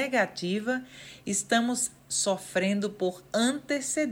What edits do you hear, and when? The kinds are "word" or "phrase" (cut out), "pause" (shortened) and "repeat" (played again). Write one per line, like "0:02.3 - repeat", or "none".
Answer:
0:02.0 - pause